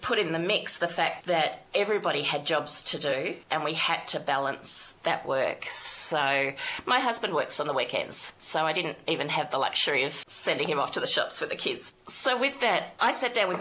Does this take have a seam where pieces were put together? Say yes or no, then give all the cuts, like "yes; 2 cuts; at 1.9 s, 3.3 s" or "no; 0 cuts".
yes; 1 cut; at 3.4 s